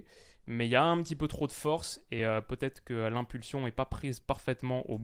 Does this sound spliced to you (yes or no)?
no